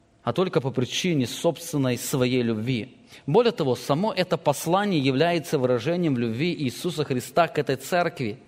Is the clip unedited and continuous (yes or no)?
yes